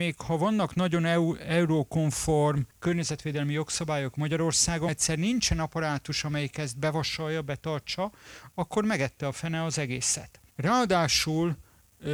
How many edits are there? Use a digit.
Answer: 3